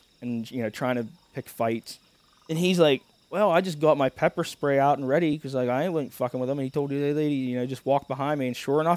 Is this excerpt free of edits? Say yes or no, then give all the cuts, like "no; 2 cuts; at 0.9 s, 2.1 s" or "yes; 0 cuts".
yes; 0 cuts